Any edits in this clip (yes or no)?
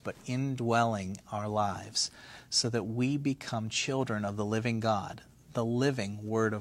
no